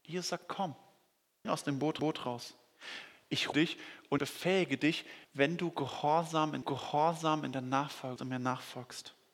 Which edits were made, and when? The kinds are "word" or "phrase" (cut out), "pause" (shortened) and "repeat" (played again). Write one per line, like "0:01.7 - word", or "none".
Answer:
0:01.4 - word
0:02.0 - repeat
0:03.5 - word
0:04.2 - word
0:05.2 - pause
0:06.6 - repeat
0:08.2 - word

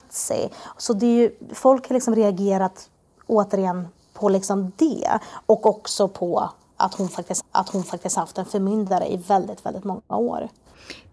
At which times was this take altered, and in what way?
0:07.4 - repeat
0:10.1 - pause

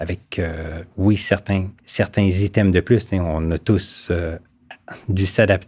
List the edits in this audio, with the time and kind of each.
0:00.9 - pause
0:01.8 - pause

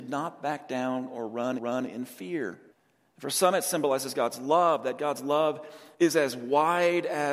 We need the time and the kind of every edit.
0:01.6 - repeat
0:02.7 - pause
0:05.9 - pause

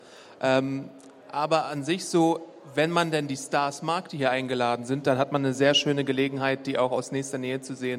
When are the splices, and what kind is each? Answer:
none

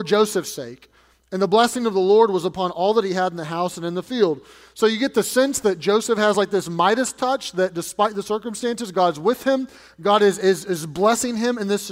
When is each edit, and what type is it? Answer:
none

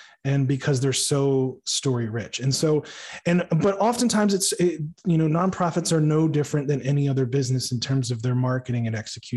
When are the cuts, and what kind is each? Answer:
none

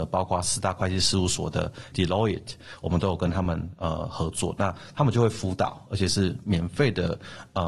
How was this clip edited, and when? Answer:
0:01.9 - word

